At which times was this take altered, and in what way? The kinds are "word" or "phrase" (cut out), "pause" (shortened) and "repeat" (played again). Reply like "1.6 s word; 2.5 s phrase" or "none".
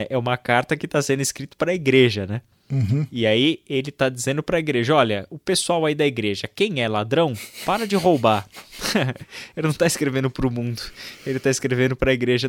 none